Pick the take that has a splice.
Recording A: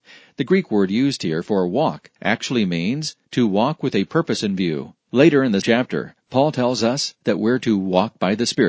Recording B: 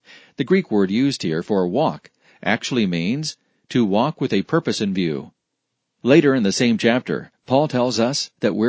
A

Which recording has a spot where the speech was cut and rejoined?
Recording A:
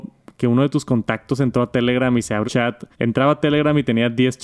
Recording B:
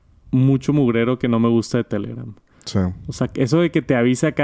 A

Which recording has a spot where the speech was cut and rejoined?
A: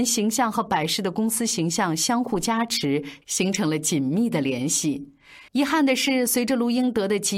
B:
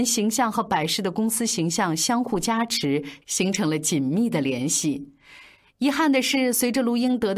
A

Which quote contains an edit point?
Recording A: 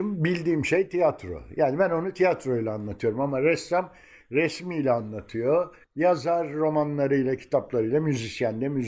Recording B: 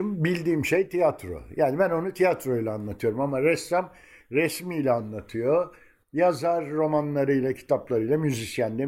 A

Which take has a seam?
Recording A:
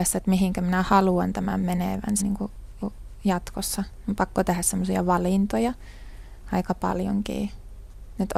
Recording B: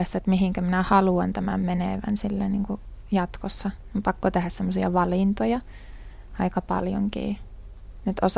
A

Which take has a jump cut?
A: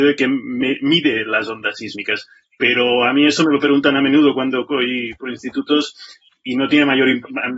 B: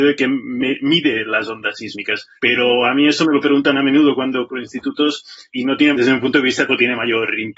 B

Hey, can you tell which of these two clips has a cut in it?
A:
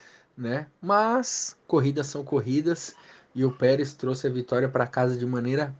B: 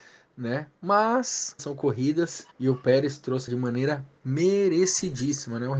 B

